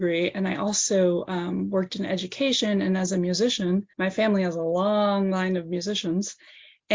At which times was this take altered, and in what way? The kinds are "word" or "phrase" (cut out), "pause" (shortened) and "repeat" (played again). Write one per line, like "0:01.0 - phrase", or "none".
0:03.9 - pause